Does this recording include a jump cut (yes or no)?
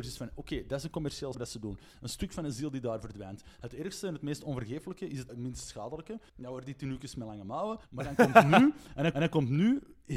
yes